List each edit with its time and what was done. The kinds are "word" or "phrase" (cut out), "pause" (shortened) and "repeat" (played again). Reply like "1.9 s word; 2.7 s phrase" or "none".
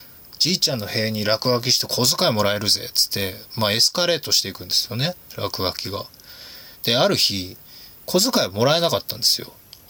6.7 s pause; 8.0 s pause